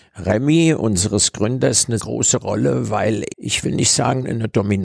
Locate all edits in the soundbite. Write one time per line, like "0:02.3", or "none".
0:02.0
0:03.3